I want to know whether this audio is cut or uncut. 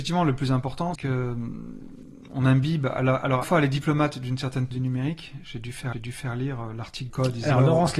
cut